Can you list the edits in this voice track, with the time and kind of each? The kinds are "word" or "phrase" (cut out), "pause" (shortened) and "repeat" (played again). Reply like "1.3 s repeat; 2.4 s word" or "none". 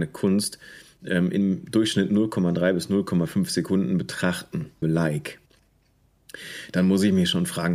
4.8 s word